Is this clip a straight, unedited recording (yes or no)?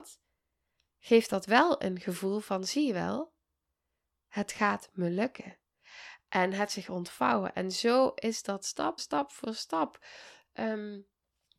no